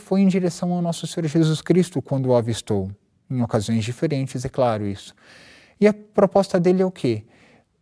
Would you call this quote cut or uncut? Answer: uncut